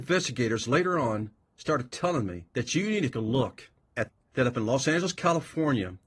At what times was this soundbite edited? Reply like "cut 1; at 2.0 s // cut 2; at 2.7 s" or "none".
cut 1; at 2.5 s // cut 2; at 3.1 s // cut 3; at 4.2 s